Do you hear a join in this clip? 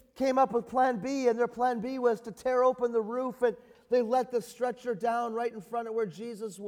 no; 0 cuts

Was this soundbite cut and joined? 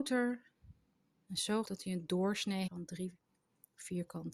yes; 2 cuts; at 1.6 s, 2.7 s

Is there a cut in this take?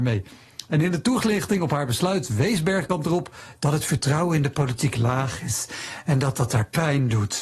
no; 0 cuts

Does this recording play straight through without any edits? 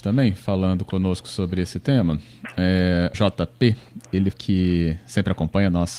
no; 2 cuts; at 3.1 s, 4.3 s

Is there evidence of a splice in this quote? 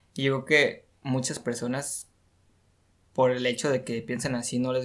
no; 0 cuts

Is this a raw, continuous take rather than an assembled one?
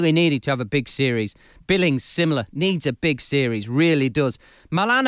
yes; 0 cuts

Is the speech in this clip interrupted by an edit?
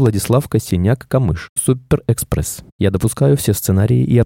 yes; 1 cut; at 1.6 s

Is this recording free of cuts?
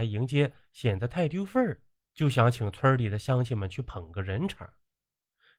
yes; 0 cuts

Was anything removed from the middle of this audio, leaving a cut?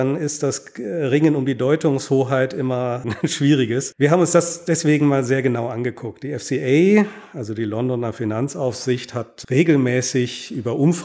no; 0 cuts

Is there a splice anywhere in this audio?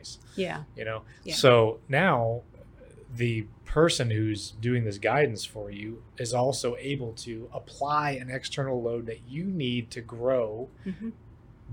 no; 0 cuts

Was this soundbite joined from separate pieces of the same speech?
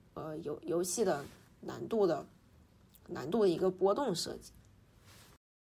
no; 0 cuts

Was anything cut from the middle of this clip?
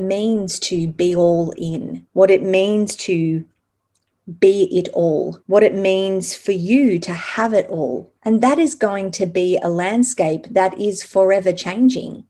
yes; 3 cuts; at 2.1 s, 5.4 s, 8.2 s

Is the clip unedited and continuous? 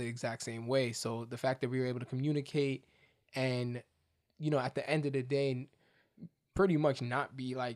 yes; 0 cuts

